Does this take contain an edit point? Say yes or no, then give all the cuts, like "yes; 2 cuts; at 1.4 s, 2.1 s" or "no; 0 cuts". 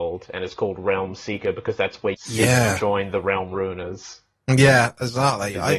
yes; 1 cut; at 2.1 s